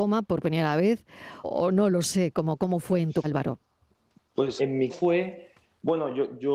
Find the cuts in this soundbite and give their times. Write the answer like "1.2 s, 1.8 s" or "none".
1.4 s, 3.2 s, 4.6 s, 4.9 s